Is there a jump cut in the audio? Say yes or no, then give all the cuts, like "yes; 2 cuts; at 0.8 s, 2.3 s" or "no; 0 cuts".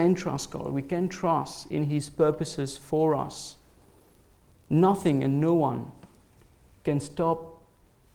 no; 0 cuts